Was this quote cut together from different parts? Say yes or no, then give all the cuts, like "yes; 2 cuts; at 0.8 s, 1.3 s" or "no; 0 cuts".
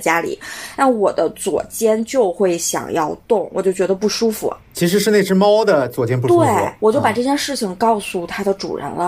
yes; 1 cut; at 4.6 s